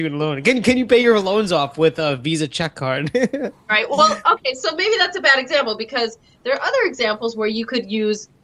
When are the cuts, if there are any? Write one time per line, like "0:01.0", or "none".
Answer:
none

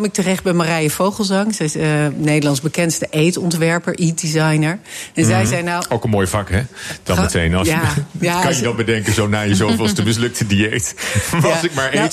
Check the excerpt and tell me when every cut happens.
none

